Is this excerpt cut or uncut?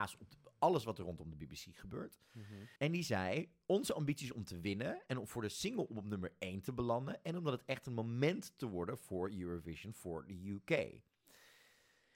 cut